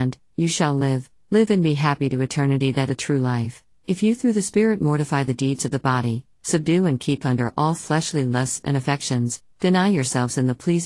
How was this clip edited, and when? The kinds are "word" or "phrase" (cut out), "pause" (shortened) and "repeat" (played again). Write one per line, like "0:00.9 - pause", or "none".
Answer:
0:02.9 - word